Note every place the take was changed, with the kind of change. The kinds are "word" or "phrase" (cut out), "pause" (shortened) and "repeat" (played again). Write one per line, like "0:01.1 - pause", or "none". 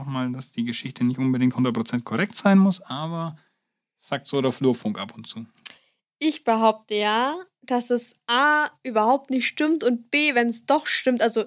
none